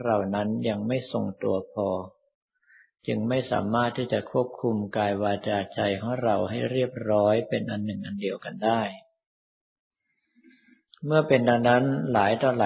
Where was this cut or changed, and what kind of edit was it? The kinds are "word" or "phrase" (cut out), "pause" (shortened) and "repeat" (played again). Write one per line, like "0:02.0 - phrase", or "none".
none